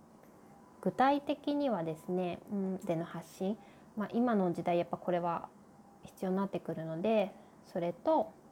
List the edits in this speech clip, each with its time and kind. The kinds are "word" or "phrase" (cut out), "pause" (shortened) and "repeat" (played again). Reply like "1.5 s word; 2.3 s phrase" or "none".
2.8 s word